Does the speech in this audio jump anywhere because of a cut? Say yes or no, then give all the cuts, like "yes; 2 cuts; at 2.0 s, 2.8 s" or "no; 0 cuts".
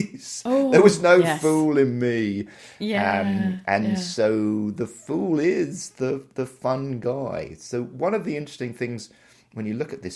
no; 0 cuts